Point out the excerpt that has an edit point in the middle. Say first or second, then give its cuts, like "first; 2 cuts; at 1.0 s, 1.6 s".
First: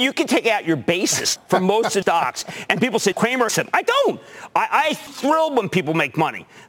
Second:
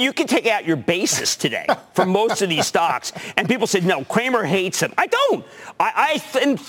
first; 5 cuts; at 1.4 s, 2.0 s, 3.1 s, 3.5 s, 5.1 s